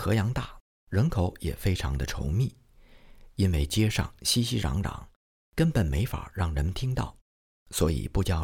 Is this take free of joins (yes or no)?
yes